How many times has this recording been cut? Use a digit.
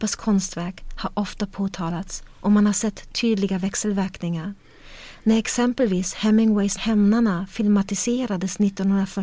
1